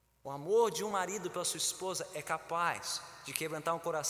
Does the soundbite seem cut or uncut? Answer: uncut